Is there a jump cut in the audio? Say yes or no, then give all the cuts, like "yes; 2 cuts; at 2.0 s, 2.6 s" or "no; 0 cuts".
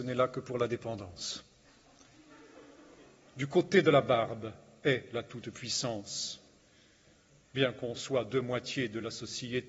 no; 0 cuts